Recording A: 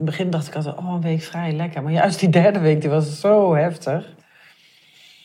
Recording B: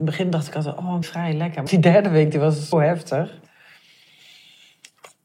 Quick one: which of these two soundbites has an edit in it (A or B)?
B